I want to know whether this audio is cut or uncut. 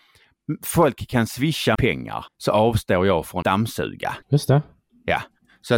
cut